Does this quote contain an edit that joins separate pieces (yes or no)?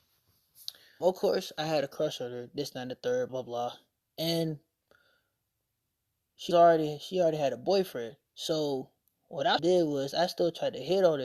yes